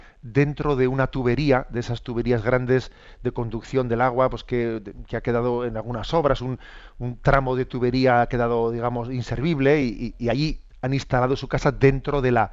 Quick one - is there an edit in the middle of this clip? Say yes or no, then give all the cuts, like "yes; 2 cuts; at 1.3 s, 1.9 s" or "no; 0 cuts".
no; 0 cuts